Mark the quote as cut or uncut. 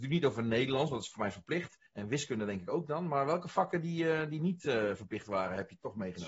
cut